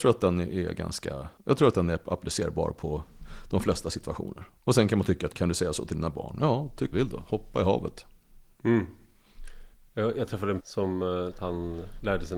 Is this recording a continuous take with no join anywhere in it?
no; 6 cuts; at 1.4 s, 5.3 s, 6.9 s, 9.7 s, 10.6 s, 11.3 s

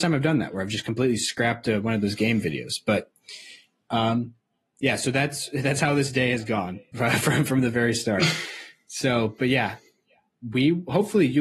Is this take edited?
no; 0 cuts

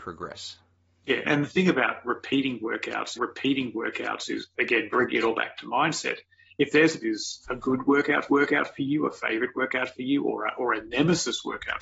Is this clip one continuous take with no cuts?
no; 4 cuts; at 1.2 s, 3.1 s, 7.0 s, 8.3 s

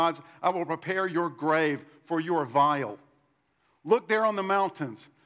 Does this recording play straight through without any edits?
yes; 0 cuts

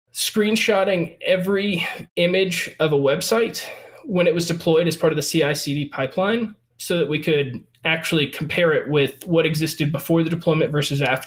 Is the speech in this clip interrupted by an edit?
yes; 2 cuts; at 2.1 s, 6.7 s

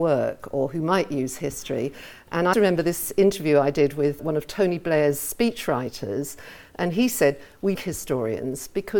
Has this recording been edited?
yes; 3 cuts; at 2.5 s, 4.2 s, 7.8 s

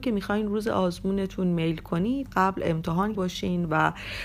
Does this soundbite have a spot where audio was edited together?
yes; 2 cuts; at 2.3 s, 3.1 s

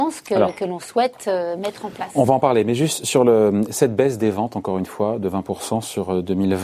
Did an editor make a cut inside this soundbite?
no; 0 cuts

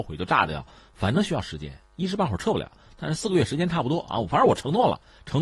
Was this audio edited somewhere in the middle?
no; 0 cuts

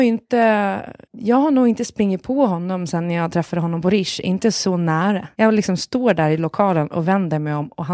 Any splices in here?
yes; 2 cuts; at 1.0 s, 5.3 s

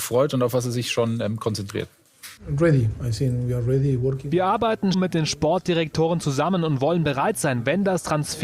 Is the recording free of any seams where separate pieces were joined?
no; 2 cuts; at 2.4 s, 4.9 s

